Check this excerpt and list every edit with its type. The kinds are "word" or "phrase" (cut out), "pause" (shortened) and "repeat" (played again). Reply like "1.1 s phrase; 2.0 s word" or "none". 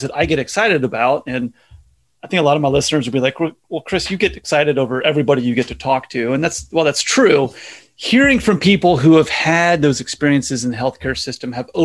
none